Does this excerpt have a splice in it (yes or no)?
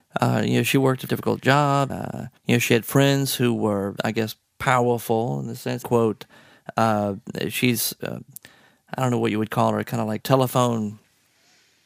yes